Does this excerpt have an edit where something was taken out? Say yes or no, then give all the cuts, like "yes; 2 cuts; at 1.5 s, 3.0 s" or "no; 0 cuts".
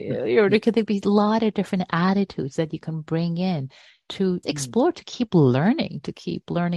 yes; 1 cut; at 4.4 s